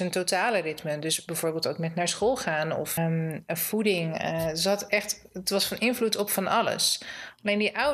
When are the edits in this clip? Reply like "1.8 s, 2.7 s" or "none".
3.0 s